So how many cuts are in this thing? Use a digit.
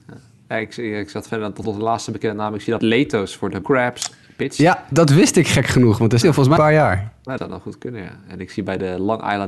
7